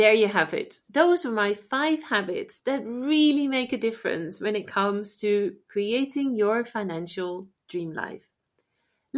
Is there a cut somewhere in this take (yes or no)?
no